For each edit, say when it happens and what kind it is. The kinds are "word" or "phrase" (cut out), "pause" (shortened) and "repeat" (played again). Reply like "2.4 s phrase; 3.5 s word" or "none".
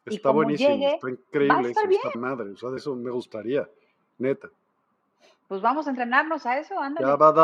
2.1 s word; 2.8 s word